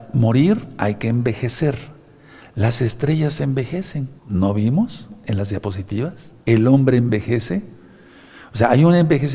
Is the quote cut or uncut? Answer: cut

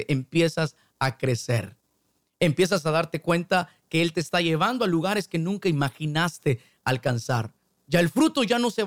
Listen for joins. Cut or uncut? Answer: uncut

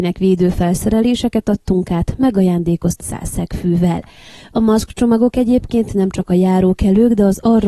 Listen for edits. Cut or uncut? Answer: cut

